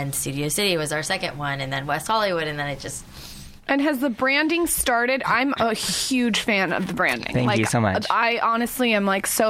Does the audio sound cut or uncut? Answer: uncut